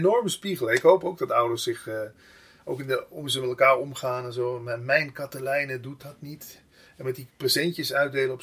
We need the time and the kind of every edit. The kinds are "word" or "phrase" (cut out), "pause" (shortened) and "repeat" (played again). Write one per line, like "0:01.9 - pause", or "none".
none